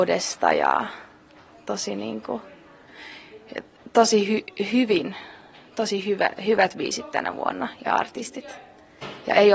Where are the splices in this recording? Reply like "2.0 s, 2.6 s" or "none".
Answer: none